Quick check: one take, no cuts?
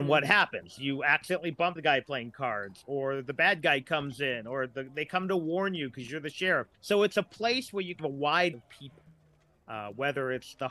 no; 4 cuts; at 1.8 s, 6.7 s, 8.0 s, 8.5 s

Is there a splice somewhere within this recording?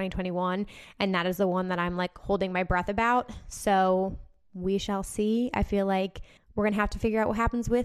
no; 0 cuts

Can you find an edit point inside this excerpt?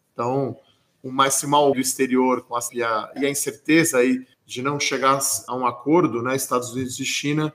yes; 5 cuts; at 1.7 s, 2.7 s, 3.2 s, 4.3 s, 5.5 s

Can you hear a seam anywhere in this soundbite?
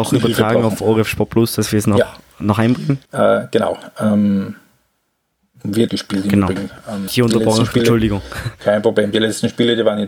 yes; 3 cuts; at 3.0 s, 5.9 s, 7.1 s

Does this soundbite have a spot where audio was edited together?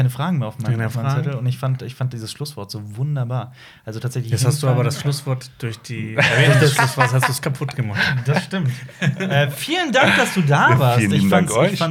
no; 0 cuts

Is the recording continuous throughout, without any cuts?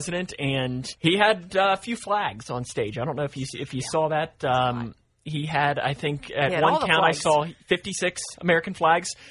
no; 1 cut; at 1.0 s

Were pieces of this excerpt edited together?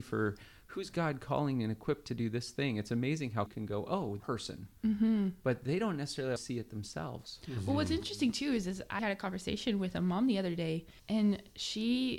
yes; 5 cuts; at 3.5 s, 4.2 s, 6.4 s, 9.0 s, 11.0 s

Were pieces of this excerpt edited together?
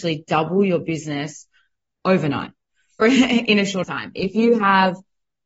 yes; 2 cuts; at 3.0 s, 3.8 s

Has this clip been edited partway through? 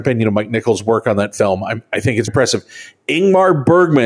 yes; 1 cut; at 2.3 s

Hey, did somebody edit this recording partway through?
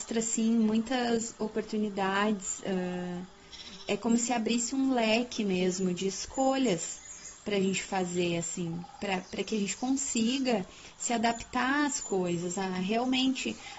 no; 0 cuts

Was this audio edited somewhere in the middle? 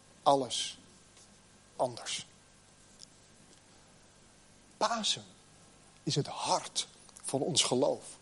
yes; 1 cut; at 1.8 s

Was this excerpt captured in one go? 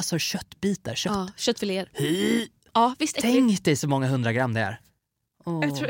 yes; 0 cuts

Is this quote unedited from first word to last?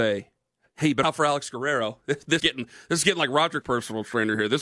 no; 3 cuts; at 1.0 s, 2.4 s, 3.6 s

